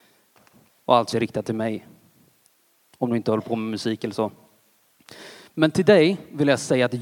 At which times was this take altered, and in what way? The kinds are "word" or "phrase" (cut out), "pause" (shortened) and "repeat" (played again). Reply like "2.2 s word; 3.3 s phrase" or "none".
1.1 s word